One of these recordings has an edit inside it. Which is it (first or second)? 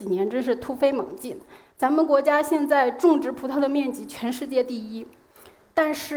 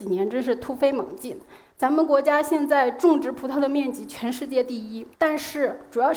second